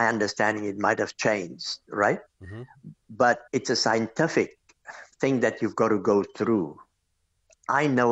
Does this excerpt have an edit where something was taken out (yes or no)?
yes